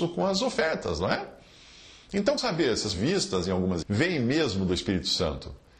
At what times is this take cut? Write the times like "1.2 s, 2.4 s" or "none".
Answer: 2.4 s, 2.9 s, 3.8 s